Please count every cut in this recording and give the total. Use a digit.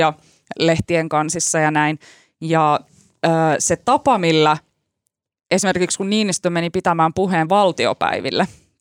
0